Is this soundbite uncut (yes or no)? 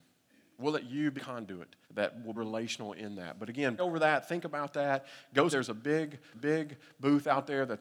no